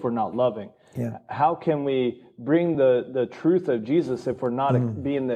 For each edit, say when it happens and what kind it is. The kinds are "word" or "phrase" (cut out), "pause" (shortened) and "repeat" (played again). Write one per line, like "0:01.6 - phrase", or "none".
none